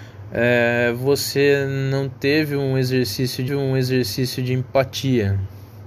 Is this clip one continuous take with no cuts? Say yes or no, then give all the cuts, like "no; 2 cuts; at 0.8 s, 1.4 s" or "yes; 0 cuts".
no; 1 cut; at 3.5 s